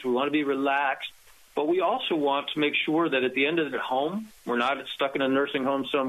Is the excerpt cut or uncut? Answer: cut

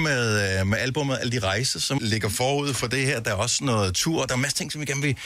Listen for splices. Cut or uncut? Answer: cut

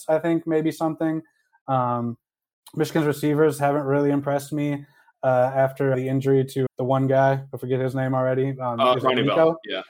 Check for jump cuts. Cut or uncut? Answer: cut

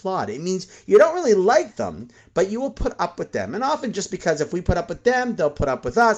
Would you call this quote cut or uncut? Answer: uncut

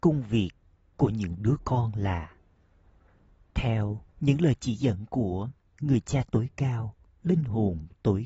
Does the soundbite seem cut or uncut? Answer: uncut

